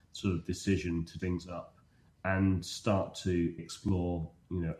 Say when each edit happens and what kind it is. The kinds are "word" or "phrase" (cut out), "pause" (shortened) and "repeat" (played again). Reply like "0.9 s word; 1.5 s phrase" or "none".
1.2 s word; 3.6 s word